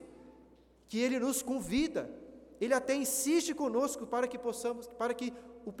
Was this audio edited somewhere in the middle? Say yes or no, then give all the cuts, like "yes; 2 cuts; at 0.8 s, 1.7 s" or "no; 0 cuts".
no; 0 cuts